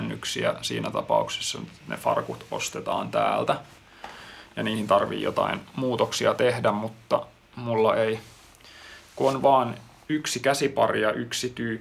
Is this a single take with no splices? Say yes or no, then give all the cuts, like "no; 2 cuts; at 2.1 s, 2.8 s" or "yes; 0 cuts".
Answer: yes; 0 cuts